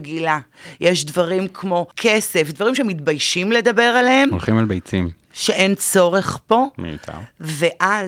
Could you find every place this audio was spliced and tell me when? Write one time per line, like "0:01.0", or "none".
0:01.9